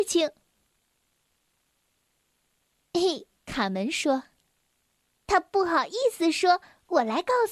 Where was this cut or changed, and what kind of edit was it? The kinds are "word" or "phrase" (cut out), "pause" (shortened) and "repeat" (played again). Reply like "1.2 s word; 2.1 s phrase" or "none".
3.4 s word